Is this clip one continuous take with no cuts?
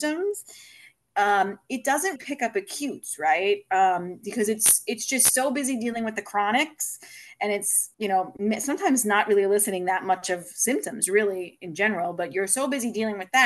no; 2 cuts; at 2.2 s, 7.9 s

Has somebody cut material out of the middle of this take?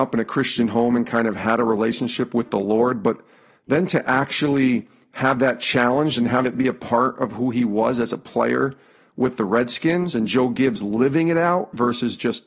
no; 0 cuts

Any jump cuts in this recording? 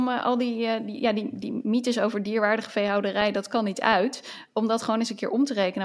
no; 0 cuts

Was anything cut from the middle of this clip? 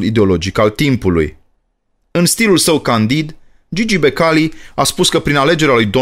no; 0 cuts

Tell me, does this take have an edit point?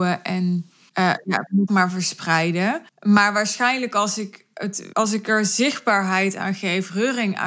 yes; 3 cuts; at 1.7 s, 2.9 s, 4.9 s

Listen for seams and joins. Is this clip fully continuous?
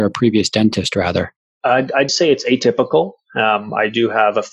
no; 2 cuts; at 1.5 s, 2.1 s

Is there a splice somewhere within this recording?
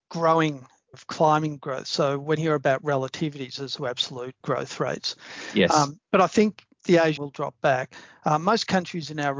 yes; 6 cuts; at 0.9 s, 1.6 s, 2.4 s, 3.8 s, 4.4 s, 7.2 s

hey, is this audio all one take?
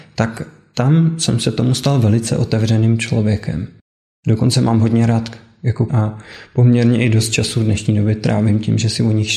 no; 1 cut; at 5.9 s

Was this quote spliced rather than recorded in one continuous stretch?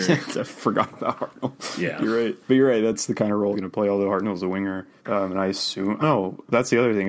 yes; 4 cuts; at 2.4 s, 3.5 s, 5.0 s, 6.0 s

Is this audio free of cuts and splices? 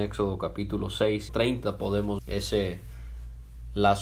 no; 2 cuts; at 1.3 s, 2.2 s

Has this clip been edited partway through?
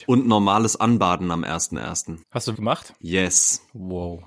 yes; 2 cuts; at 2.2 s, 2.5 s

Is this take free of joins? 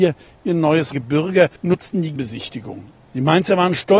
no; 3 cuts; at 0.9 s, 1.6 s, 2.2 s

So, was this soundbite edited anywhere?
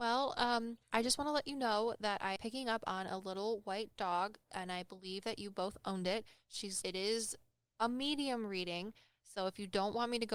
yes; 2 cuts; at 2.4 s, 6.8 s

